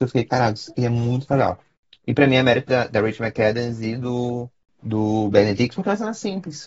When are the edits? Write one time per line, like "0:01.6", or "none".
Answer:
none